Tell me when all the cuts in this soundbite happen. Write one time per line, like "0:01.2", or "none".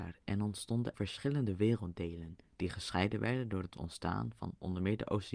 0:00.9